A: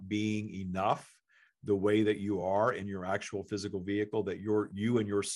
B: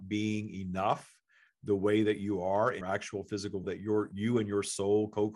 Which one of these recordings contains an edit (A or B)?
B